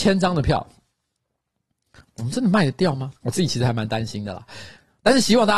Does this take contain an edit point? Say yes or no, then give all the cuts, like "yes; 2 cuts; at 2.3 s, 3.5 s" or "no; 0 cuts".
yes; 1 cut; at 3.2 s